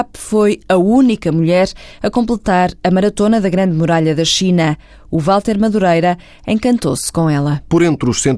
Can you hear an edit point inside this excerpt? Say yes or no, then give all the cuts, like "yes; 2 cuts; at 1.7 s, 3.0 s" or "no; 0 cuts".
no; 0 cuts